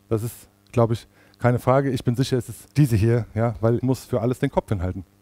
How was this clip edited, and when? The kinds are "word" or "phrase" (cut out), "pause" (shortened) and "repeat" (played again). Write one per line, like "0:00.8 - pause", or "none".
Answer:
0:02.7 - pause
0:03.8 - word